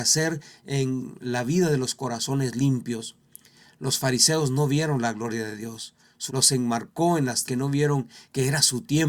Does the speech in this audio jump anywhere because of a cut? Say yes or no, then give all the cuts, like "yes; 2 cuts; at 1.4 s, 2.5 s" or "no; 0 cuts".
yes; 2 cuts; at 6.3 s, 7.5 s